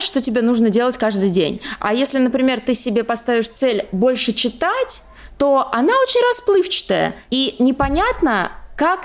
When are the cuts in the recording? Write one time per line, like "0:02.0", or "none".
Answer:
none